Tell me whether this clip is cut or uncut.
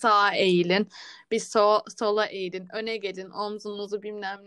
uncut